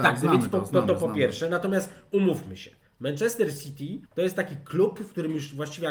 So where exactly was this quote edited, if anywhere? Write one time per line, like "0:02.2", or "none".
0:04.1